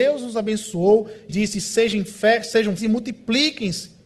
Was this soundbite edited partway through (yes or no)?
yes